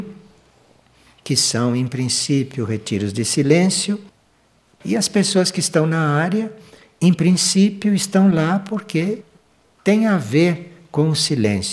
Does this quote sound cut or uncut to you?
uncut